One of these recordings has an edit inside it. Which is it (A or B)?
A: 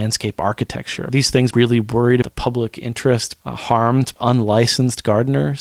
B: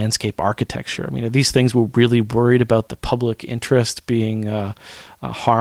A